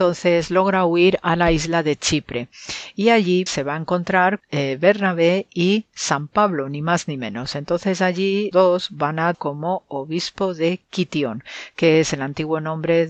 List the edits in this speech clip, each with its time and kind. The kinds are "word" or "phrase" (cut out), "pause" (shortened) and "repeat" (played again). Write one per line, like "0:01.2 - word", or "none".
0:03.5 - word
0:04.4 - word
0:08.5 - word
0:09.3 - word